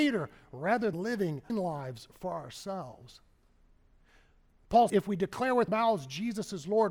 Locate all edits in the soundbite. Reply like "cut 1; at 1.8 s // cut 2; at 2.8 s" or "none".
cut 1; at 0.9 s // cut 2; at 1.5 s // cut 3; at 4.9 s // cut 4; at 5.7 s